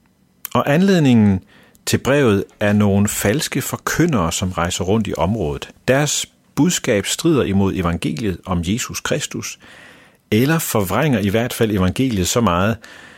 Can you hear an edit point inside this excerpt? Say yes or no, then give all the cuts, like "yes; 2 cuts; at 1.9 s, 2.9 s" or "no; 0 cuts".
no; 0 cuts